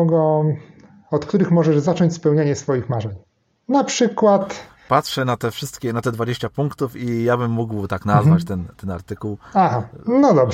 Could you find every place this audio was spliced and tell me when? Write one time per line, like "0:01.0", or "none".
none